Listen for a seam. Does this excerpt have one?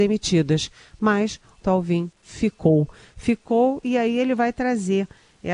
yes; 1 cut; at 1.6 s

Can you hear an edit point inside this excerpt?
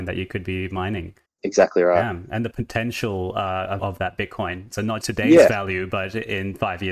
yes; 4 cuts; at 1.3 s, 2.5 s, 3.8 s, 5.0 s

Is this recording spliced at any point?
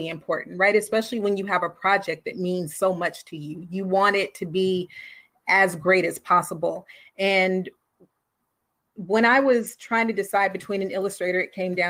no; 0 cuts

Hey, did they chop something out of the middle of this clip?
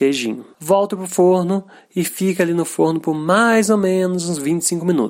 no; 0 cuts

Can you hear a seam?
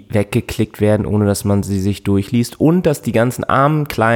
no; 0 cuts

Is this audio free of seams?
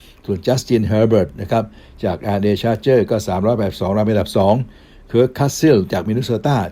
yes; 0 cuts

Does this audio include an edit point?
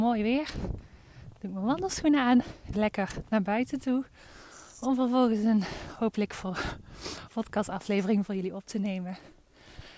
yes; 2 cuts; at 2.7 s, 7.3 s

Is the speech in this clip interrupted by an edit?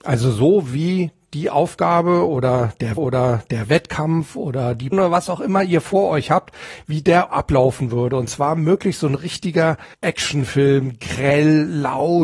yes; 4 cuts; at 3.0 s, 4.9 s, 7.3 s, 9.9 s

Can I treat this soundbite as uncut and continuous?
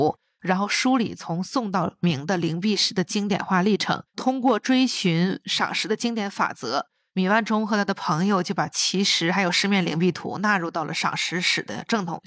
no; 1 cut; at 4.1 s

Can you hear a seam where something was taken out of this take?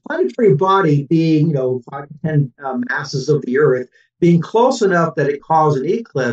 yes; 2 cuts; at 2.6 s, 5.4 s

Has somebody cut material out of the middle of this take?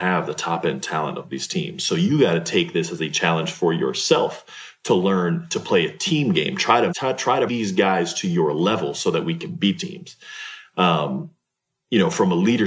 yes; 3 cuts; at 6.9 s, 7.5 s, 9.8 s

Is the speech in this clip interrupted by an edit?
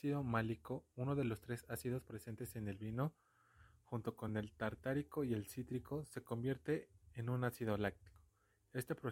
no; 0 cuts

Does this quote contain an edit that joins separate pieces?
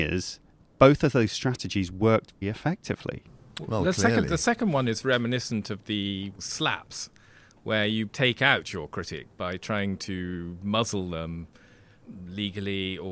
yes; 3 cuts; at 2.4 s, 5.0 s, 8.1 s

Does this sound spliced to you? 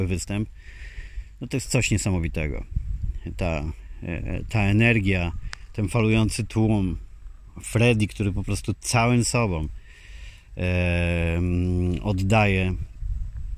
no; 0 cuts

